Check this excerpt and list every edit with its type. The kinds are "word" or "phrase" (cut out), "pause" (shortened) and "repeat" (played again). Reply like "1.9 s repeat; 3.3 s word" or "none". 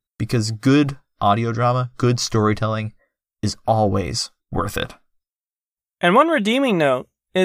4.4 s pause

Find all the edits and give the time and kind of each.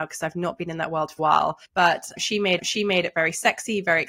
1.2 s word; 1.6 s pause; 2.6 s repeat

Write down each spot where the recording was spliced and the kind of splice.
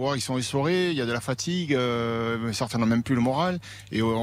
none

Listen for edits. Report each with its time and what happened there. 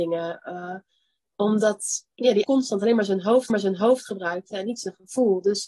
2.1 s pause; 2.4 s word; 3.5 s repeat

